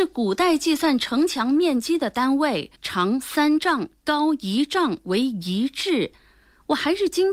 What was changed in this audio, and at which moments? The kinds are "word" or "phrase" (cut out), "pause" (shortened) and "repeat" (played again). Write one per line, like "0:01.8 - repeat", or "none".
0:02.7 - pause